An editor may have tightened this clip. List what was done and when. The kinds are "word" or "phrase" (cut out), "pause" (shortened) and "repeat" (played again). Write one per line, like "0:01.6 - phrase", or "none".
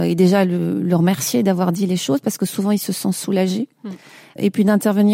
none